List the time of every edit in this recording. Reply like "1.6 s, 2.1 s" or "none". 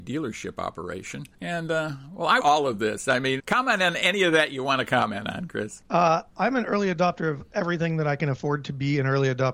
1.3 s, 2.4 s, 3.4 s, 6.3 s